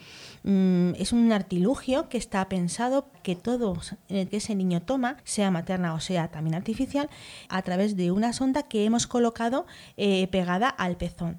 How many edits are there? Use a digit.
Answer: 4